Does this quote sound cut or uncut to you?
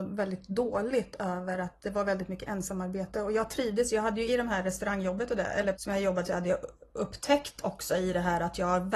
cut